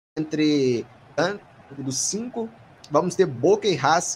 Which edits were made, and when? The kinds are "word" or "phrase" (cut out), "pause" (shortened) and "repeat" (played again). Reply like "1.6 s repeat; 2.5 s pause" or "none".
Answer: none